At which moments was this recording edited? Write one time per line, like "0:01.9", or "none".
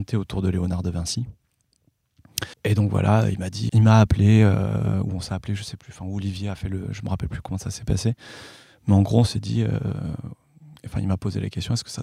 0:02.5
0:03.7